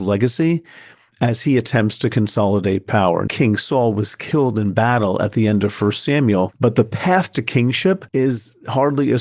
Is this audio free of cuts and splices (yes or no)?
no